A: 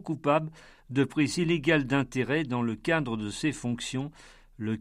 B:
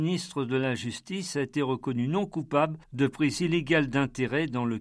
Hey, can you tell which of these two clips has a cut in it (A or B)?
B